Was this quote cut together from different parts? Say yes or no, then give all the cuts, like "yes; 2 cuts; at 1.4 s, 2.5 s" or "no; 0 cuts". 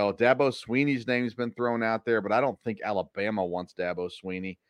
no; 0 cuts